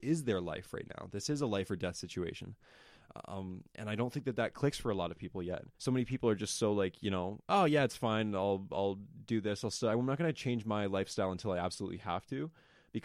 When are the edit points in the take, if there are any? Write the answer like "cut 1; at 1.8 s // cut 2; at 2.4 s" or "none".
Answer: cut 1; at 5.7 s